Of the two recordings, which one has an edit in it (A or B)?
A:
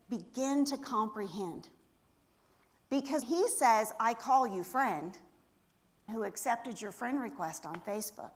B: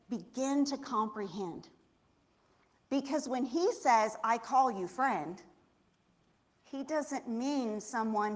A